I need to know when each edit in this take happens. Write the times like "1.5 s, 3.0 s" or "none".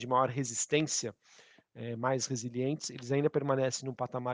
none